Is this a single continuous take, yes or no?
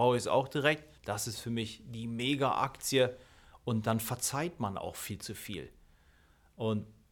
no